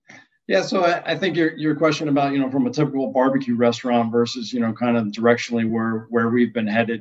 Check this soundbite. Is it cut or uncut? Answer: uncut